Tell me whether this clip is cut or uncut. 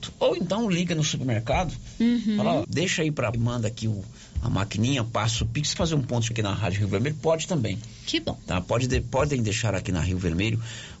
cut